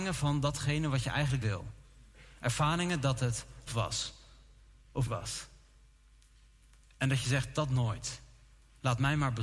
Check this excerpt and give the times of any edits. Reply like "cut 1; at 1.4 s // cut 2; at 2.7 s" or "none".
cut 1; at 1.4 s // cut 2; at 3.7 s // cut 3; at 5.1 s